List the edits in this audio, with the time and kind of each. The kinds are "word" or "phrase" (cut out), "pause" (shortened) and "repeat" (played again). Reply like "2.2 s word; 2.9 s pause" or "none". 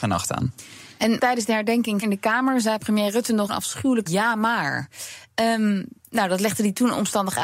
1.2 s word; 2.0 s word; 3.5 s phrase; 4.1 s phrase